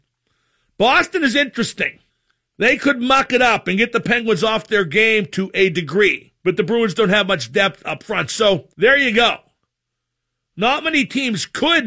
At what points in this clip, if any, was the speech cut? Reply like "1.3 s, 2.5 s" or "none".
2.1 s, 6.4 s, 8.7 s